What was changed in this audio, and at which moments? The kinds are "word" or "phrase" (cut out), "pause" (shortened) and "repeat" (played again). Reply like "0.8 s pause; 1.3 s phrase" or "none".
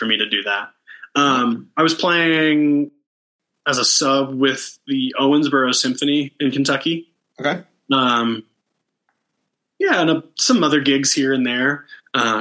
none